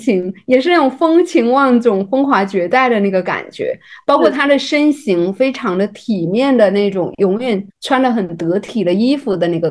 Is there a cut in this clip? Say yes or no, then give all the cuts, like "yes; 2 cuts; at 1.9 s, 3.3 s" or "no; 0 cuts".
yes; 1 cut; at 7.7 s